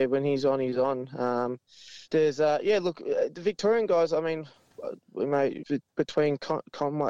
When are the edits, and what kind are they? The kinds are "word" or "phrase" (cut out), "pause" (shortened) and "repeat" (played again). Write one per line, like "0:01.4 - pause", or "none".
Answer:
0:02.0 - pause